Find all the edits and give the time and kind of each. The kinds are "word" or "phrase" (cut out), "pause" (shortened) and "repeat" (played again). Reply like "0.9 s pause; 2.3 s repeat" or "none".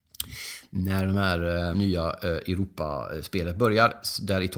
1.7 s word